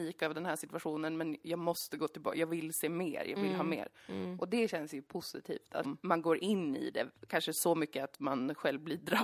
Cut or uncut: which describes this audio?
cut